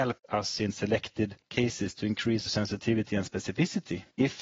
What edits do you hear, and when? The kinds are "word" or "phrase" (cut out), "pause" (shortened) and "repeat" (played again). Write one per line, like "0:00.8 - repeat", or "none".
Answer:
0:02.5 - word